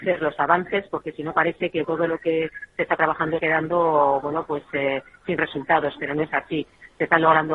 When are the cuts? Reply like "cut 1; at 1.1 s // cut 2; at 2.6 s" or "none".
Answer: cut 1; at 1.8 s // cut 2; at 3.4 s